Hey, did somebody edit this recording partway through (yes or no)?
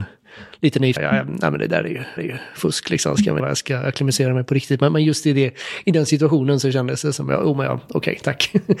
yes